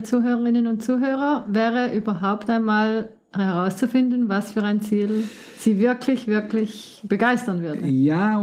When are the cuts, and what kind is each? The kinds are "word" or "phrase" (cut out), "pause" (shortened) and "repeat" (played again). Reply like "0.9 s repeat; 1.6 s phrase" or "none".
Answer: none